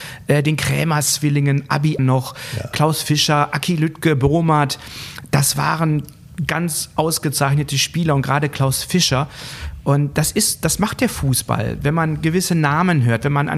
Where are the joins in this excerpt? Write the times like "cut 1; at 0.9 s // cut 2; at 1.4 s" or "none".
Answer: cut 1; at 2.0 s